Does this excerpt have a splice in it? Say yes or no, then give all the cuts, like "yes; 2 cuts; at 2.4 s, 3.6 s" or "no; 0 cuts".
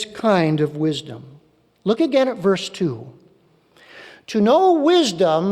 no; 0 cuts